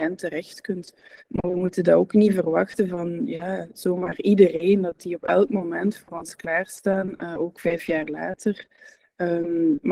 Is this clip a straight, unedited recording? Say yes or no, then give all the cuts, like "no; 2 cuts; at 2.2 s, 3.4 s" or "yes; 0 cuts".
no; 1 cut; at 1.2 s